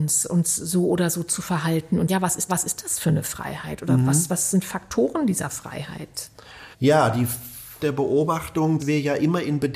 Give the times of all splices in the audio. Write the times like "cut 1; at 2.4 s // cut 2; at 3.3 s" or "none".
cut 1; at 2.1 s // cut 2; at 2.5 s // cut 3; at 6.7 s // cut 4; at 7.8 s // cut 5; at 8.8 s